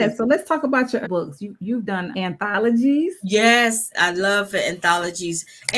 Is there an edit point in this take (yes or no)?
yes